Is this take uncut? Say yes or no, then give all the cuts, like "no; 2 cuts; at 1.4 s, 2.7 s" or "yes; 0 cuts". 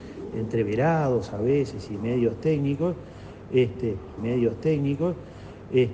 no; 1 cut; at 4.2 s